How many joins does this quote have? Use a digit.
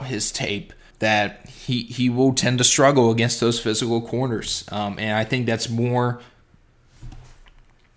1